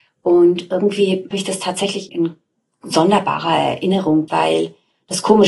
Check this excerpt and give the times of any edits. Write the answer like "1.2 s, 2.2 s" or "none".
1.3 s, 2.1 s, 4.3 s